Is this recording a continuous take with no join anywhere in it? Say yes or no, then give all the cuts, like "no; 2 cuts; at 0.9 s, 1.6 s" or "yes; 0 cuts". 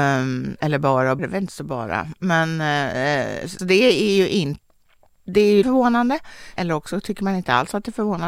no; 4 cuts; at 1.2 s, 3.6 s, 5.6 s, 6.6 s